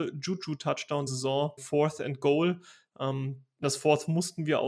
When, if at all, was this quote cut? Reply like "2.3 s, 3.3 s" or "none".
1.1 s, 1.6 s, 3.6 s